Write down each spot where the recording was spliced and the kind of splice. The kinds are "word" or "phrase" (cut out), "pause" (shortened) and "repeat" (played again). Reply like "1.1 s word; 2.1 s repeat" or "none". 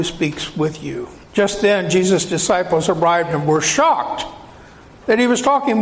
1.2 s pause